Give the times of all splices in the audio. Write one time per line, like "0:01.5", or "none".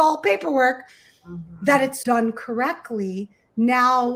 0:02.0